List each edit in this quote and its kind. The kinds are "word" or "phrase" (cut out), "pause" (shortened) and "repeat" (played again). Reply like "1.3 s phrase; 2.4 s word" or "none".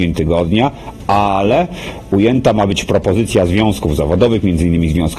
none